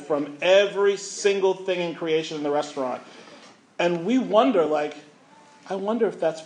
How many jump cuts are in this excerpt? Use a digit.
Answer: 0